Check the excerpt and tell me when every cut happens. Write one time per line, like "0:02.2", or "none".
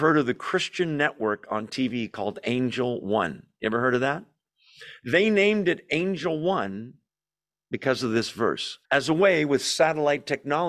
0:08.8